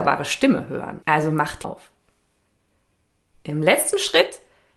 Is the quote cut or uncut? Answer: cut